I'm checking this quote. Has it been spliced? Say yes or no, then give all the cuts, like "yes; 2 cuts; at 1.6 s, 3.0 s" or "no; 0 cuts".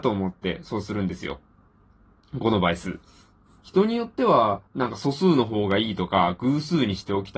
yes; 2 cuts; at 3.5 s, 4.7 s